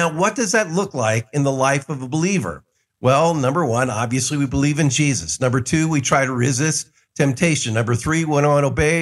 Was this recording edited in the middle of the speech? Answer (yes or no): no